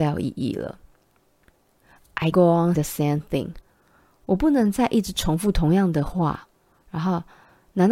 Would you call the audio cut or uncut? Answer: cut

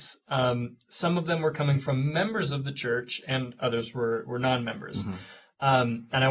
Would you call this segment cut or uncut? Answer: uncut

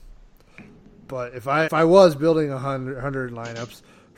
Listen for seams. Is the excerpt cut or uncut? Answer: cut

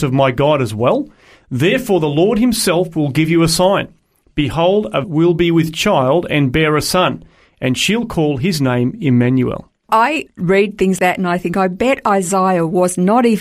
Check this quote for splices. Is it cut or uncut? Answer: cut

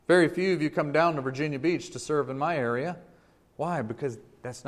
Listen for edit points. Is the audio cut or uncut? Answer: uncut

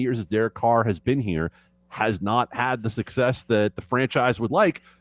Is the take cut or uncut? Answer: uncut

